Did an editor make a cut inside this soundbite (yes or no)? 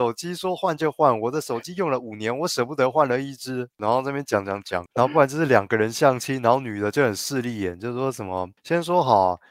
yes